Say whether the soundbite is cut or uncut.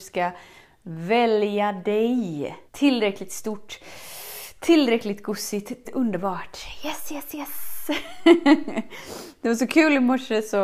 cut